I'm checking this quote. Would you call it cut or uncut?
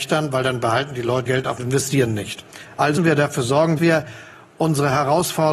cut